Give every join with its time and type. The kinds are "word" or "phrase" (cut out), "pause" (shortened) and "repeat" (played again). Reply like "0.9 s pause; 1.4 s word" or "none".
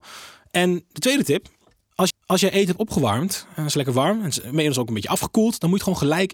2.1 s repeat